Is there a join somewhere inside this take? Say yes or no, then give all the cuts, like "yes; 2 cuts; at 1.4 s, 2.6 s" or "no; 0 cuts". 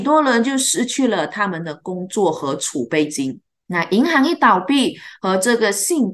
no; 0 cuts